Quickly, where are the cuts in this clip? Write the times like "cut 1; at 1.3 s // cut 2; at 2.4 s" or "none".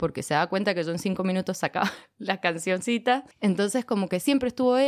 cut 1; at 3.3 s